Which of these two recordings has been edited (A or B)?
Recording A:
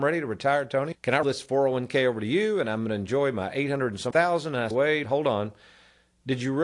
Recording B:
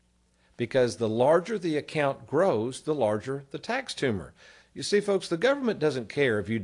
A